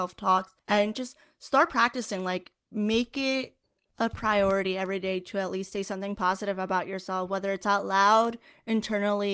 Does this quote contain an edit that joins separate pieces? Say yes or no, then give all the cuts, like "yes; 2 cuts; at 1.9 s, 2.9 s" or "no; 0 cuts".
no; 0 cuts